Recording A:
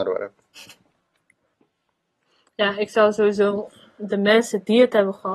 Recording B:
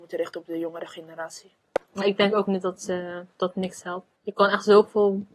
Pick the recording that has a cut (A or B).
B